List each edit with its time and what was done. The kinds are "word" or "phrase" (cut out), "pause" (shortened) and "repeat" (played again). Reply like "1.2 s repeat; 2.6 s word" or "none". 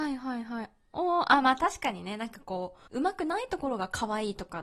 2.9 s pause